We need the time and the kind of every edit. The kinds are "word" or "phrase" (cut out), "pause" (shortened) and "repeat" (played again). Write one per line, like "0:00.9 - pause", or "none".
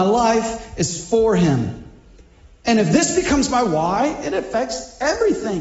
none